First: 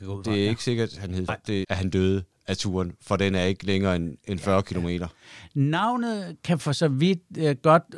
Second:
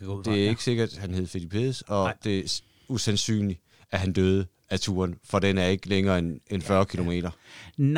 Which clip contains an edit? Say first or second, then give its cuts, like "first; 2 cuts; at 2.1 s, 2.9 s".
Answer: first; 2 cuts; at 1.3 s, 1.6 s